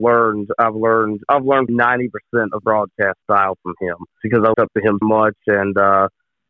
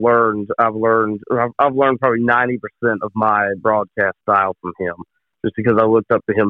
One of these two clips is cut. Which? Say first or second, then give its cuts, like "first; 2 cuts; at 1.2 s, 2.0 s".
first; 6 cuts; at 1.2 s, 1.7 s, 2.6 s, 4.2 s, 4.5 s, 5.0 s